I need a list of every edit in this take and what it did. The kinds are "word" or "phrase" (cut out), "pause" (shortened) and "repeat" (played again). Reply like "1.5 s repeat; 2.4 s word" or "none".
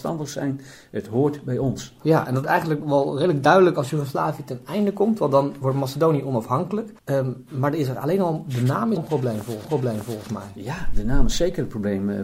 2.4 s word; 2.8 s word; 7.0 s pause; 9.0 s word; 9.6 s repeat